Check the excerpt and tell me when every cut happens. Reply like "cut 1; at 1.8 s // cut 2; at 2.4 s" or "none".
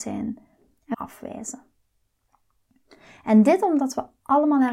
cut 1; at 0.9 s